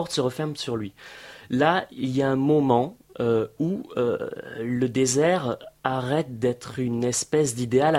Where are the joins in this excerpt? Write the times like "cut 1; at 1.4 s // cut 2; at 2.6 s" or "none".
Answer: none